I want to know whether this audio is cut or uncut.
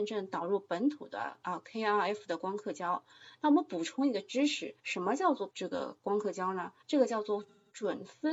cut